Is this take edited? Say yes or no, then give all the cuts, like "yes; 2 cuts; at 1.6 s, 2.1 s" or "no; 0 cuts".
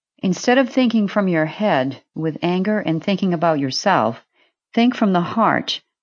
no; 0 cuts